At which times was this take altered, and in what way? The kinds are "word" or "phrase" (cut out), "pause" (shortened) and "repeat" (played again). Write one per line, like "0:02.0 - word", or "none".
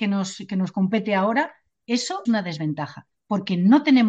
0:02.2 - word